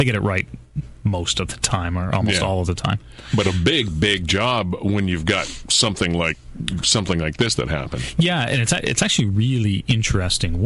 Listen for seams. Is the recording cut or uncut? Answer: uncut